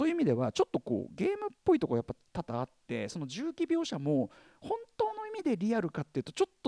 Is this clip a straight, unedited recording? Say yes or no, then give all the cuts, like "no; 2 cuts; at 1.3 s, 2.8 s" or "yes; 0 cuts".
yes; 0 cuts